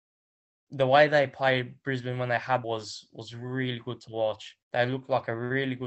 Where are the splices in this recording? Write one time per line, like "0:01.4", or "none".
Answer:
0:02.6
0:04.6